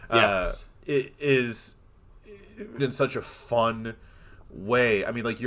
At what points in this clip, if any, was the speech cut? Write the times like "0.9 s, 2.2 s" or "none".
2.8 s